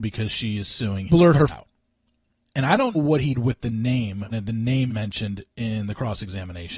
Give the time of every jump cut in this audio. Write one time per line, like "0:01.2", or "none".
0:01.1
0:01.5
0:02.9
0:03.3
0:04.3
0:04.9